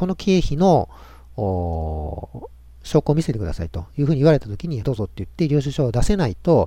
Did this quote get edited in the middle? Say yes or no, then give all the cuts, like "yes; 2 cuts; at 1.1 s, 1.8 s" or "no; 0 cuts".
yes; 1 cut; at 4.8 s